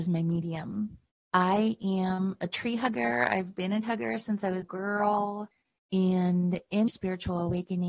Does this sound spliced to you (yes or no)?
yes